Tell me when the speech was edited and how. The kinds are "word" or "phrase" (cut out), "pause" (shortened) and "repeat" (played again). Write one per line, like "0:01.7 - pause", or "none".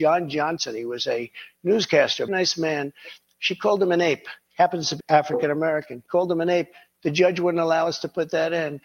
0:02.3 - word
0:05.0 - word